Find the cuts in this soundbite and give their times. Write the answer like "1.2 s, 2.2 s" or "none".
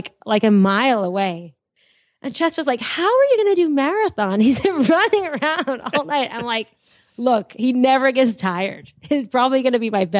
none